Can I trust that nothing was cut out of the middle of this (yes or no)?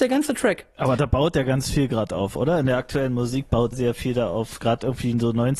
no